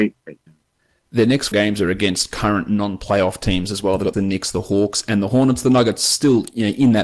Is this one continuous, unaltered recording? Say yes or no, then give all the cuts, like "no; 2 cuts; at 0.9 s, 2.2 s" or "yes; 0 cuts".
no; 2 cuts; at 1.5 s, 4.1 s